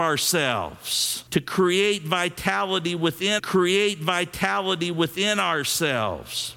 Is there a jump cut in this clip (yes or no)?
yes